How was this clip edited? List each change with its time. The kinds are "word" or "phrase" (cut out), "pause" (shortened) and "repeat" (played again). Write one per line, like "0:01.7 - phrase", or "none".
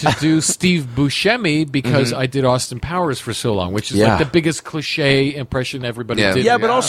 none